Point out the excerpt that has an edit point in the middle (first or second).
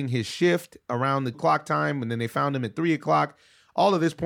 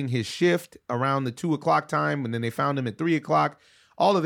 first